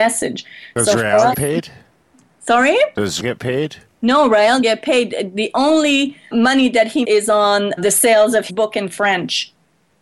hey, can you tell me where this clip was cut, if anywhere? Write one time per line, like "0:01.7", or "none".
0:01.3
0:03.2
0:04.6
0:06.3
0:07.0
0:07.8
0:08.5